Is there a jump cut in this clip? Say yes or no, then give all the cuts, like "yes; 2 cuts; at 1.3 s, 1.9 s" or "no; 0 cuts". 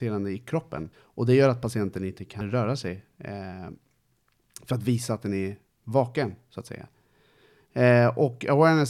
yes; 1 cut; at 0.9 s